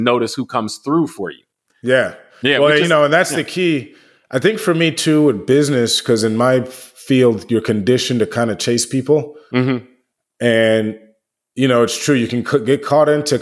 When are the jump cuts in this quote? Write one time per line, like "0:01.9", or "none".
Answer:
none